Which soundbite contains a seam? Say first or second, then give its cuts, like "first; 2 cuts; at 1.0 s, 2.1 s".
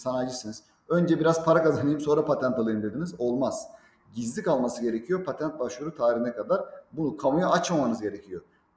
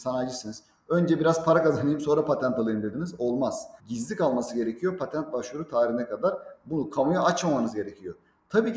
second; 1 cut; at 3.8 s